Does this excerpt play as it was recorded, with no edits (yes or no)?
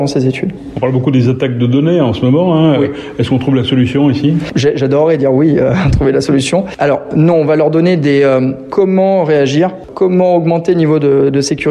yes